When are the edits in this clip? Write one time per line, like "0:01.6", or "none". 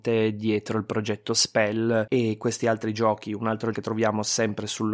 0:03.7